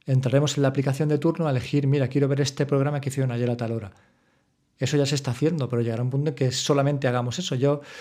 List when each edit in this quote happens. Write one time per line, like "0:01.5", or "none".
none